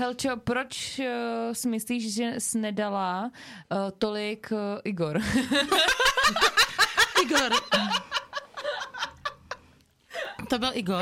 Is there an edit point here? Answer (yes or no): no